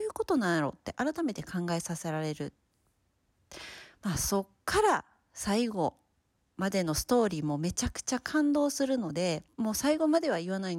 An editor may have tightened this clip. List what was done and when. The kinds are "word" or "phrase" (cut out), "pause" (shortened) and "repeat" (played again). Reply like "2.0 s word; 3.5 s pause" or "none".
none